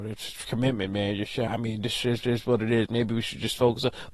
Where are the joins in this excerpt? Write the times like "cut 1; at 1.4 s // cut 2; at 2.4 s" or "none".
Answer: cut 1; at 1.5 s // cut 2; at 2.2 s